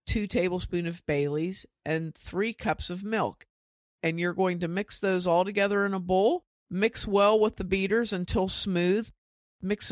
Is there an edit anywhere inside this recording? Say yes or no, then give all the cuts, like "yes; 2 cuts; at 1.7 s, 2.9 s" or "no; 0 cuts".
no; 0 cuts